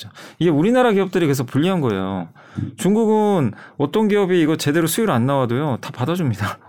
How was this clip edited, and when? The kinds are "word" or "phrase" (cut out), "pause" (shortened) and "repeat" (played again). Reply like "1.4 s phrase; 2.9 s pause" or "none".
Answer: none